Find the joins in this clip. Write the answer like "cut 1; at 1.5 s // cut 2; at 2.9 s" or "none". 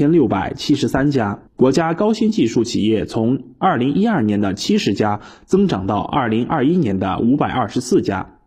cut 1; at 1.5 s